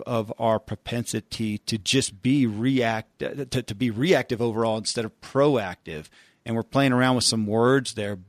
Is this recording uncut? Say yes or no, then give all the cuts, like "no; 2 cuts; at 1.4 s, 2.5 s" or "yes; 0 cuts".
yes; 0 cuts